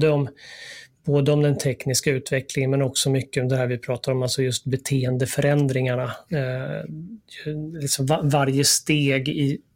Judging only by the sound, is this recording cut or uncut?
uncut